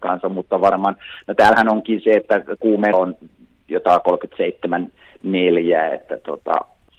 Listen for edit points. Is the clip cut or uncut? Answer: cut